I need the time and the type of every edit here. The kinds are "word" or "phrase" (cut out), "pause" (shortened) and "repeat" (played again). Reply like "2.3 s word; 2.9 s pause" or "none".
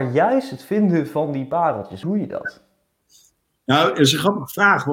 2.0 s word